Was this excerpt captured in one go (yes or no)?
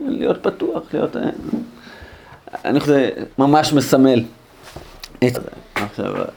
no